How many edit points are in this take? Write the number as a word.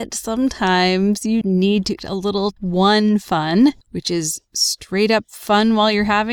four